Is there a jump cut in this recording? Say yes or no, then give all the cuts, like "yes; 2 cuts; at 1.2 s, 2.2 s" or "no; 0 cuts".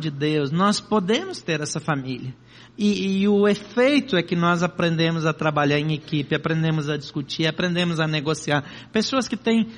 no; 0 cuts